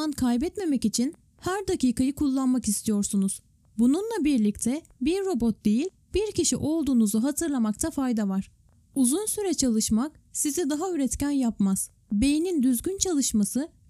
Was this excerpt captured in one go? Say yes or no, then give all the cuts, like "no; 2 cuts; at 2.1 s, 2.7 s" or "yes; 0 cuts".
yes; 0 cuts